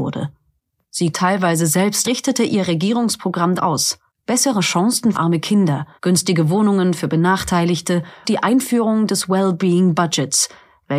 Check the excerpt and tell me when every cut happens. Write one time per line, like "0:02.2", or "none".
0:01.1
0:02.0
0:03.6
0:04.1
0:05.1
0:06.0
0:08.2